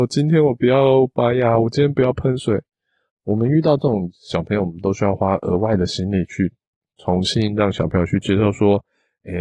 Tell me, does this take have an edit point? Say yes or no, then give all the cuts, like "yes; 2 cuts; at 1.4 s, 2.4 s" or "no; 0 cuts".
yes; 1 cut; at 3.1 s